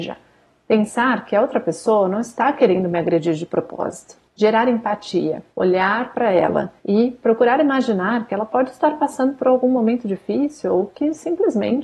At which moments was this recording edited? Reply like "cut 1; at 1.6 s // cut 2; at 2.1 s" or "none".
cut 1; at 4.3 s // cut 2; at 5.5 s // cut 3; at 6.8 s